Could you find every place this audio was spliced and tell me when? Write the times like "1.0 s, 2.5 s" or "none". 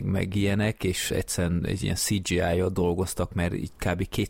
1.1 s